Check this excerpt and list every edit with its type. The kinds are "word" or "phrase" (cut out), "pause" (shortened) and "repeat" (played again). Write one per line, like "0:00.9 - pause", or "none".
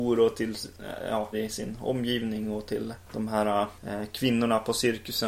0:01.3 - word